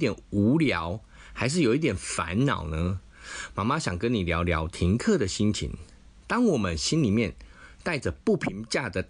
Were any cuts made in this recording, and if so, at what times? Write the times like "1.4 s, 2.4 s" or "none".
6.1 s